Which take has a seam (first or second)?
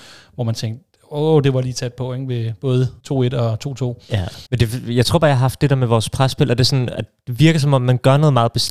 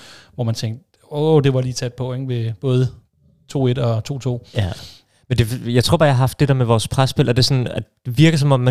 first